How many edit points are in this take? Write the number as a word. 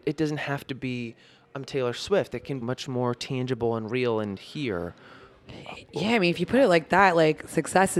one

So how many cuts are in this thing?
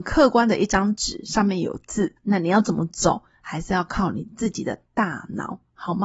one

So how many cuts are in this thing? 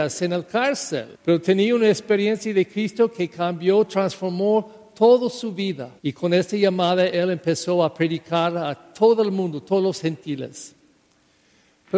two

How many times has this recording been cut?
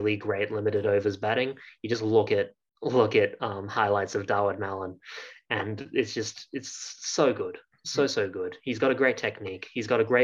zero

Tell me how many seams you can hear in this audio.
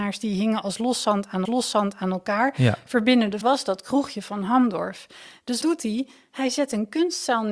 three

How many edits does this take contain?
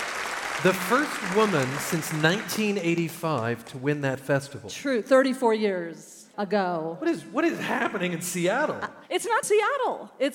three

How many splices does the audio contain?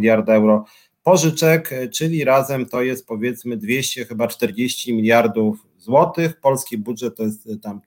zero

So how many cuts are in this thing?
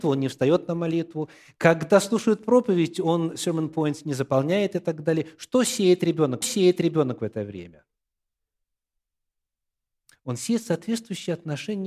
one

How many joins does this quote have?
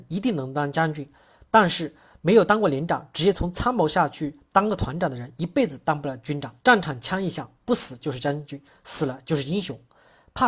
one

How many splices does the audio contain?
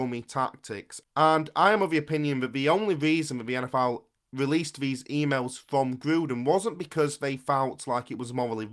zero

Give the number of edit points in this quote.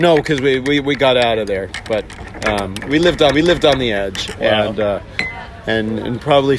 one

